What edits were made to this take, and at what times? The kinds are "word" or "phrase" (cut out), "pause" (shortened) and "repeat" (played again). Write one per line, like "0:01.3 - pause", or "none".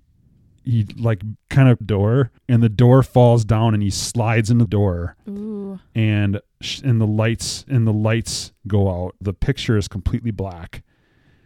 0:01.4 - pause
0:01.8 - phrase
0:02.4 - pause
0:04.7 - phrase
0:07.7 - repeat
0:09.2 - word